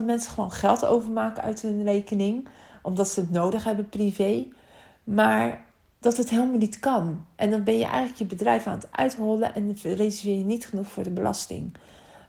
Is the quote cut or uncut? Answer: uncut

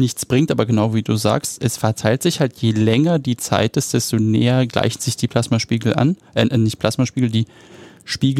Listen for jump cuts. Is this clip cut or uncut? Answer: uncut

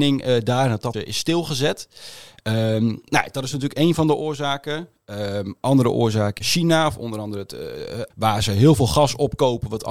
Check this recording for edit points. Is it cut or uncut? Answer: cut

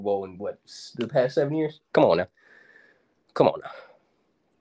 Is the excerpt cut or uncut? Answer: uncut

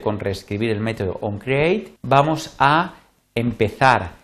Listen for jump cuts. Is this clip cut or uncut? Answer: cut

